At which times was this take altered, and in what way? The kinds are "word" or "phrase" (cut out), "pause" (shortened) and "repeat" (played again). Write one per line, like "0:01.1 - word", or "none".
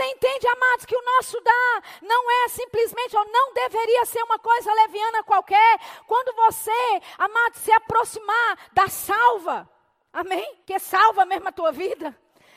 0:10.6 - pause